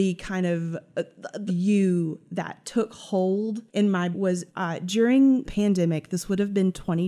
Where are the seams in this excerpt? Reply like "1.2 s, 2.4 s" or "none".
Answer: 1.5 s, 3.7 s, 4.1 s, 4.5 s, 5.4 s